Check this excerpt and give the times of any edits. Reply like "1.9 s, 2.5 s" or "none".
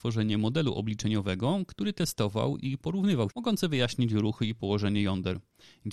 3.3 s